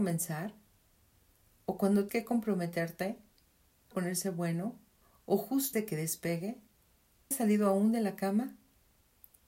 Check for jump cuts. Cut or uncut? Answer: cut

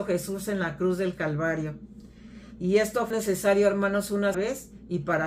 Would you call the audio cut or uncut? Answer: cut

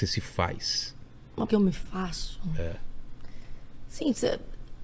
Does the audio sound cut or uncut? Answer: cut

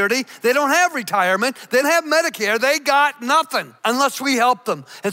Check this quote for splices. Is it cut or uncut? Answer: cut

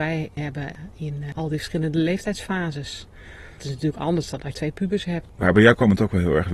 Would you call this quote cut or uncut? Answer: cut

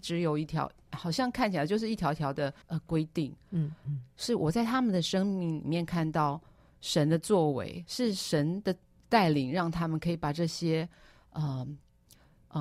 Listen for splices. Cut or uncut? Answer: cut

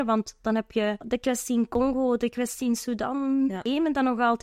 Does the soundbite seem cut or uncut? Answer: uncut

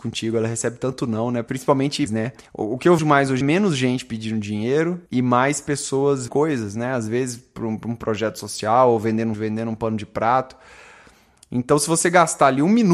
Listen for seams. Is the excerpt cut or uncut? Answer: cut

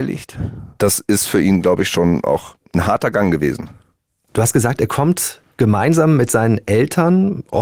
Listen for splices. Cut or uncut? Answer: uncut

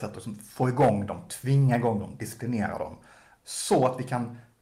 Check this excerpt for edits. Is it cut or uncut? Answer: uncut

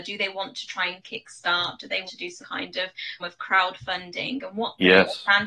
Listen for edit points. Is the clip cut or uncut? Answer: cut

